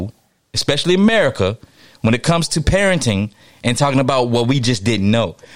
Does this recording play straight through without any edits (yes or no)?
yes